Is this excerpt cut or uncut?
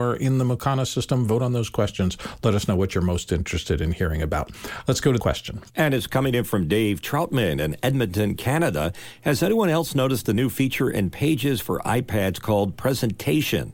cut